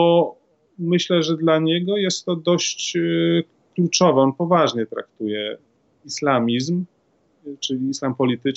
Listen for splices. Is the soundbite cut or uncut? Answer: uncut